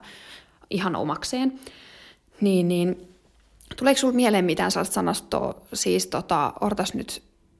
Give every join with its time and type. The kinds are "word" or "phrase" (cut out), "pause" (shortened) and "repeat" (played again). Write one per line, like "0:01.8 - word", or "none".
none